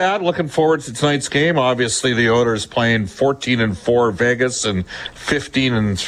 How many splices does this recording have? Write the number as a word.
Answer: zero